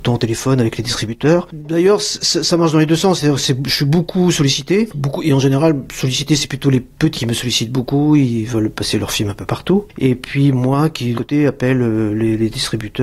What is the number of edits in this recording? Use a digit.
2